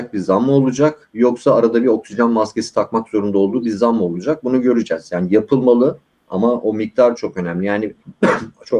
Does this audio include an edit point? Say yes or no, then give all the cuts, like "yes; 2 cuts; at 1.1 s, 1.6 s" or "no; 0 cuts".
no; 0 cuts